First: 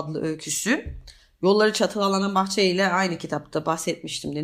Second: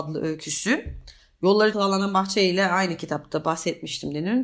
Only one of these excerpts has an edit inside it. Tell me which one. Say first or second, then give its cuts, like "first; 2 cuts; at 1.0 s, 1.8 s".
second; 1 cut; at 1.7 s